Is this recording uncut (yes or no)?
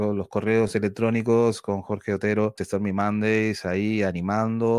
no